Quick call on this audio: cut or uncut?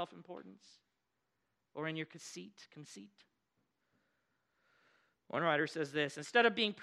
uncut